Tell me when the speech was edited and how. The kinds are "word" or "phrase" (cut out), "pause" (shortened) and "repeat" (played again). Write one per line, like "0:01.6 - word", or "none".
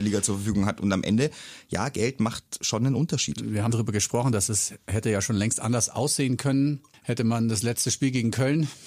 0:03.7 - word